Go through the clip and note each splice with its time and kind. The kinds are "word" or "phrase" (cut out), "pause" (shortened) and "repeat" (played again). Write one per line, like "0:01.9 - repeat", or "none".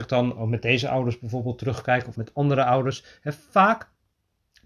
0:02.2 - word